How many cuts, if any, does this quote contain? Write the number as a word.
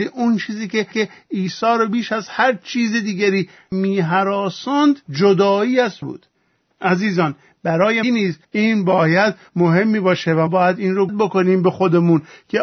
eight